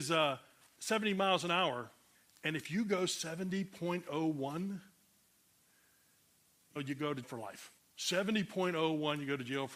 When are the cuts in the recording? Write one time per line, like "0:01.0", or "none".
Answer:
0:02.1
0:06.8
0:07.2
0:07.8